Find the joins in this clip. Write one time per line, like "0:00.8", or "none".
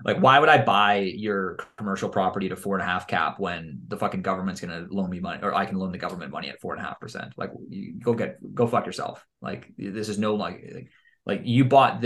none